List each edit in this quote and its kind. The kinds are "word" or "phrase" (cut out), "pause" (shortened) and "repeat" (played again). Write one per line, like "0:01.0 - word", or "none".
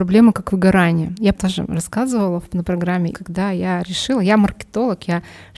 0:01.3 - phrase
0:02.6 - word
0:03.1 - phrase